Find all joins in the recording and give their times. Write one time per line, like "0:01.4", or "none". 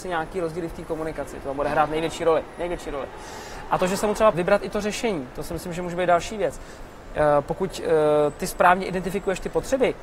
0:04.3